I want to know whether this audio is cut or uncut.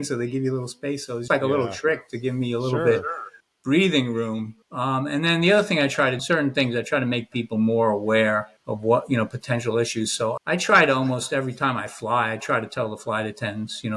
cut